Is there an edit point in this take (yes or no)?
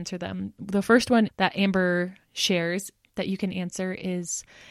yes